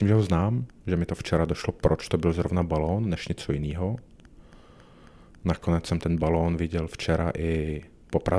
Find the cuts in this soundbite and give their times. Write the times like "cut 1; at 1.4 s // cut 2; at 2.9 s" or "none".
none